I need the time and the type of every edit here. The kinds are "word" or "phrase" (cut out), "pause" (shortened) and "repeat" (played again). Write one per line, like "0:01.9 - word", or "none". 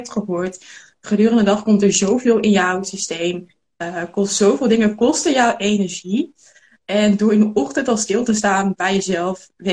none